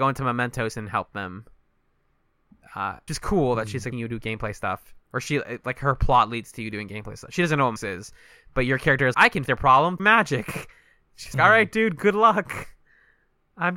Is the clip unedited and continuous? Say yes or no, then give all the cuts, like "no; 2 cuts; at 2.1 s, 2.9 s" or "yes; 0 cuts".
no; 7 cuts; at 3.1 s, 3.9 s, 7.8 s, 9.1 s, 9.5 s, 10.0 s, 11.3 s